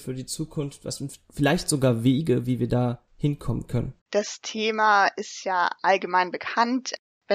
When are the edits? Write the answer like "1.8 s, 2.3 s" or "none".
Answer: 3.1 s, 4.0 s